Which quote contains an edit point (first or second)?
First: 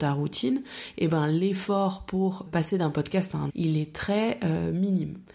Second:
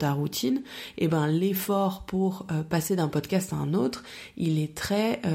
first